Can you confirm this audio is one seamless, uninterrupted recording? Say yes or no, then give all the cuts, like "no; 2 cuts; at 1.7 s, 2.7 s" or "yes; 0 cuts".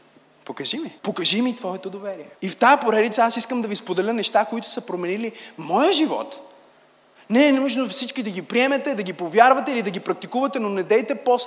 no; 2 cuts; at 1.0 s, 2.4 s